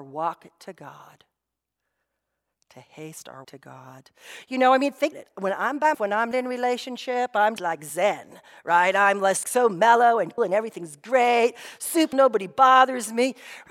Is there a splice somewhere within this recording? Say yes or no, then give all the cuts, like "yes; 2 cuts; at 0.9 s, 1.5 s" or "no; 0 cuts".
yes; 8 cuts; at 3.4 s, 5.1 s, 5.9 s, 6.3 s, 7.6 s, 9.4 s, 10.4 s, 12.1 s